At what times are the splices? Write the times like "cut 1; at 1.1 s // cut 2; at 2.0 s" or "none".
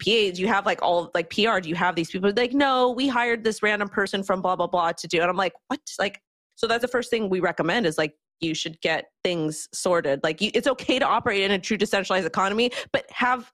cut 1; at 6.8 s // cut 2; at 9.2 s